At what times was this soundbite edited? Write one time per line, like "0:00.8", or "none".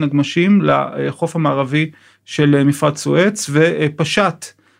none